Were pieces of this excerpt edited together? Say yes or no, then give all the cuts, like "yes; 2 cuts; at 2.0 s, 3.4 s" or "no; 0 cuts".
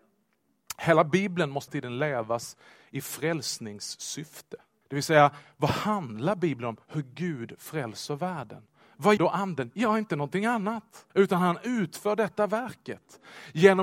yes; 4 cuts; at 1.7 s, 4.8 s, 9.2 s, 11.1 s